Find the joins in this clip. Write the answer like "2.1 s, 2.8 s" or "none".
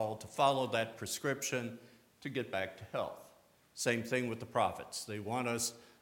none